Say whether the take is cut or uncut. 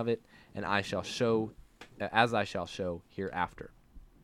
uncut